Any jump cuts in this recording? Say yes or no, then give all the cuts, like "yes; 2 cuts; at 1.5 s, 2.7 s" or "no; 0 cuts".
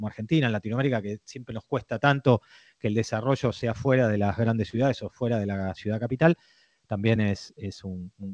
no; 0 cuts